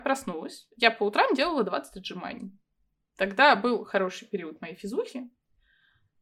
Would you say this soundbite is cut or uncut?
uncut